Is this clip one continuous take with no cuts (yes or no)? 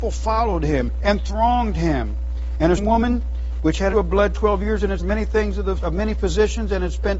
no